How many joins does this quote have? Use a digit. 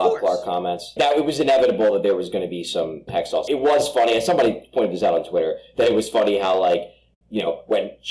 3